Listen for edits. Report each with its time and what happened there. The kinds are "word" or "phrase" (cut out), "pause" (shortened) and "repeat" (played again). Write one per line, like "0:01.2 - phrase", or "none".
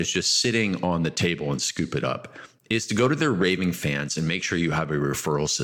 none